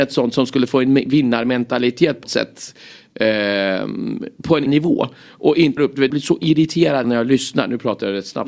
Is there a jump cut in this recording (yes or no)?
yes